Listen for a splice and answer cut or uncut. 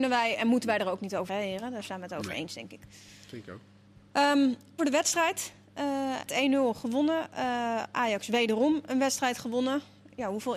cut